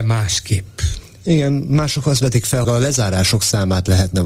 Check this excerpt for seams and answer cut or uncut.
cut